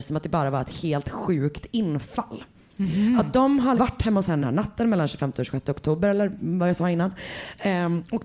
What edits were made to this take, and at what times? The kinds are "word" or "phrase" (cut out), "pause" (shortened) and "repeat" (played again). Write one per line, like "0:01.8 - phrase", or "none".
0:03.8 - word
0:04.4 - word